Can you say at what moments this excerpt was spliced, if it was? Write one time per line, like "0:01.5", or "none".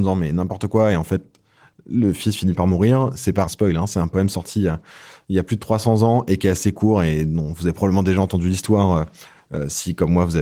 0:03.5